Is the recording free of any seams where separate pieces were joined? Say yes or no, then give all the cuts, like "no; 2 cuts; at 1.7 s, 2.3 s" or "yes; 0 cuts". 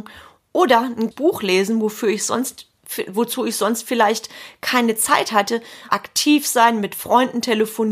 no; 2 cuts; at 1.1 s, 5.9 s